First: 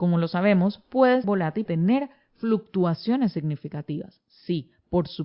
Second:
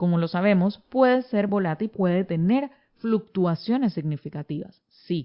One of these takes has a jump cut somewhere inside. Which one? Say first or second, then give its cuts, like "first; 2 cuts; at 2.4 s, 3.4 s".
first; 2 cuts; at 1.2 s, 1.7 s